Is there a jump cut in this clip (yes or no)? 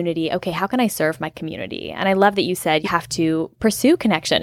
yes